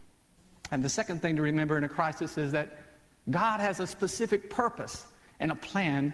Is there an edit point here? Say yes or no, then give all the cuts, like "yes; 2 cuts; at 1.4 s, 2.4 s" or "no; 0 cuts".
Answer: no; 0 cuts